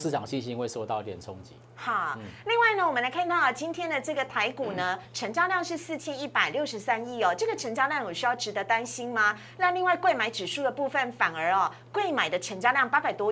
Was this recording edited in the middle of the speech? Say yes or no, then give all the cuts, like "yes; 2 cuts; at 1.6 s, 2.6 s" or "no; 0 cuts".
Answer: no; 0 cuts